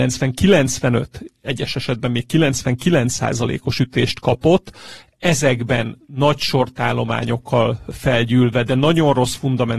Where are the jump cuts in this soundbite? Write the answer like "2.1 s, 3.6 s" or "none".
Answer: none